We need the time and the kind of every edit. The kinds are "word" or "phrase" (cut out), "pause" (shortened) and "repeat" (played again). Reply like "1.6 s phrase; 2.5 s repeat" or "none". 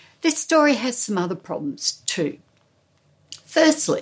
none